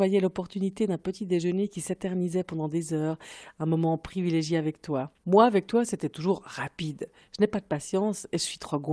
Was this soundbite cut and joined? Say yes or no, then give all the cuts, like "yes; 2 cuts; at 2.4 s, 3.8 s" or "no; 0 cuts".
yes; 1 cut; at 5.2 s